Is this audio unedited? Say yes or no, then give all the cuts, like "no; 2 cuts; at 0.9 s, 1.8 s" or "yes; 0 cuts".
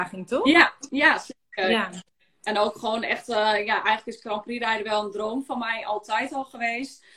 yes; 0 cuts